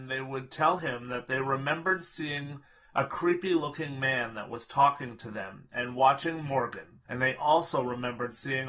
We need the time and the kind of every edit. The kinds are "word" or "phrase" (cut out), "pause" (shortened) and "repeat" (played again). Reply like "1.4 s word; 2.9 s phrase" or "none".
7.1 s pause

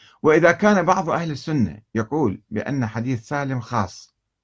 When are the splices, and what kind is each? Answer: 1.9 s pause

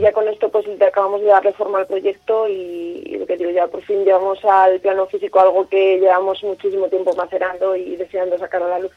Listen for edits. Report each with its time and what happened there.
none

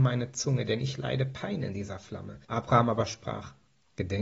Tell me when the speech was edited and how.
2.4 s pause

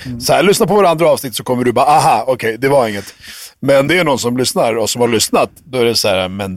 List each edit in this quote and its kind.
3.9 s word

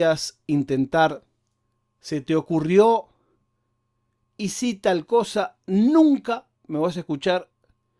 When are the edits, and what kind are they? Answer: none

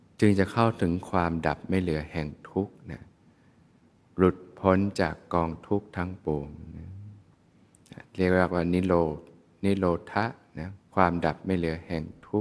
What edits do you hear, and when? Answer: 10.8 s pause

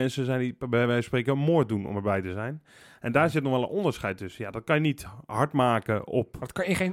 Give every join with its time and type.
none

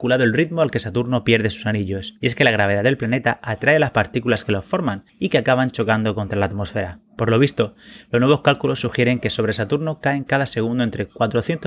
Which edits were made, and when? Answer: 2.2 s pause; 5.1 s pause; 7.1 s pause

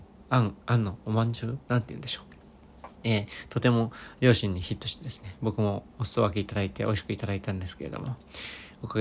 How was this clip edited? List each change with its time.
1.6 s pause; 2.9 s pause

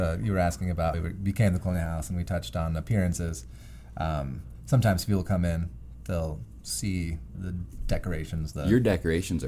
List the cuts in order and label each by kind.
0.9 s word; 7.3 s word

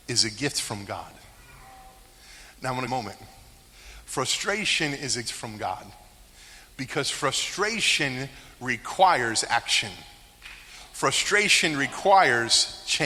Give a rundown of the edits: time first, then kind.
2.9 s phrase; 5.2 s word

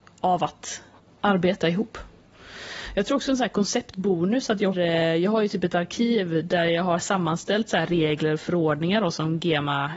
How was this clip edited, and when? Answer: 1.0 s pause; 3.2 s phrase; 4.7 s word

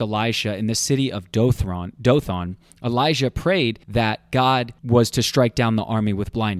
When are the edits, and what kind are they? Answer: 3.8 s pause; 4.8 s pause

